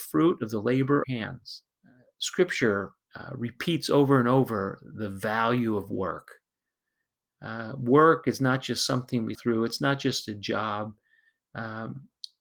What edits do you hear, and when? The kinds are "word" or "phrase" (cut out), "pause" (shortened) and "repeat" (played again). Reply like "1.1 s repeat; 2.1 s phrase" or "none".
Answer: 1.0 s phrase; 1.7 s pause; 3.0 s pause; 9.3 s word